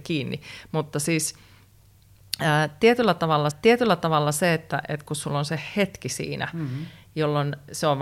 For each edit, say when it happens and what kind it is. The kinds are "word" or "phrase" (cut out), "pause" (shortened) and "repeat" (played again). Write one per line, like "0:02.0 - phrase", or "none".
0:03.5 - repeat